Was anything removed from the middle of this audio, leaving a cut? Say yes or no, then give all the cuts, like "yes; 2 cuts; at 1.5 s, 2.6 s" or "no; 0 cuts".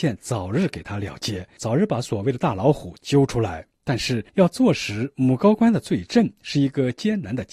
yes; 3 cuts; at 1.6 s, 3.7 s, 4.3 s